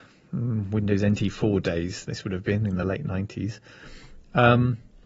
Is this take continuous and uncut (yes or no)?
yes